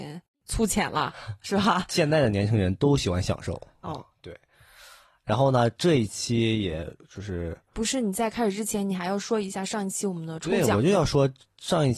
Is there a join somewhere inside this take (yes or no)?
no